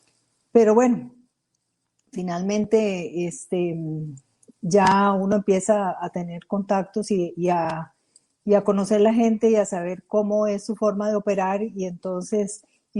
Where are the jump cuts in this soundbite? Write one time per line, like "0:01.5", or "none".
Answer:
none